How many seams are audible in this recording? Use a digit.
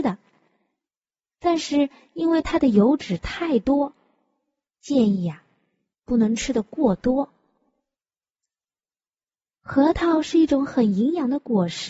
0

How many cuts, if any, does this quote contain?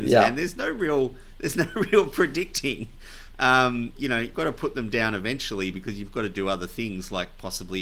2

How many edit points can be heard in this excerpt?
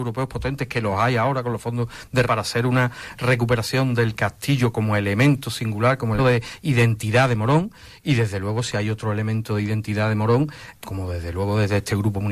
3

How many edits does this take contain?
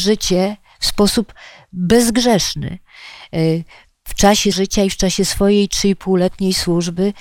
1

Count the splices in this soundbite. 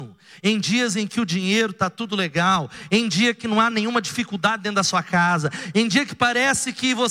0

